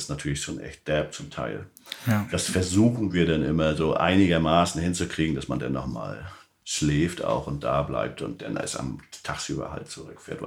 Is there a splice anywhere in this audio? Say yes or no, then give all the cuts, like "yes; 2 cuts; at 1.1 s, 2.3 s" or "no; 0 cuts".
no; 0 cuts